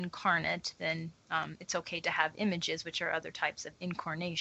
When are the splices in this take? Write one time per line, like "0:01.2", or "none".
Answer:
0:01.2